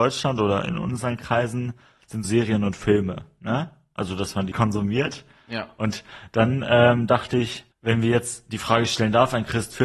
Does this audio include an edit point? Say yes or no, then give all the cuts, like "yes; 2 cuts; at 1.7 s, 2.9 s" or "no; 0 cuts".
yes; 3 cuts; at 2.2 s, 4.5 s, 7.7 s